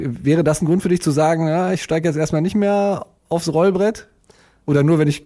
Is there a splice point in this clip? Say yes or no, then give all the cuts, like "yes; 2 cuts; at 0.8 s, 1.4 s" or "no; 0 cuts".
no; 0 cuts